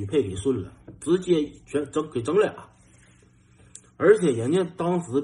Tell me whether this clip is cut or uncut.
cut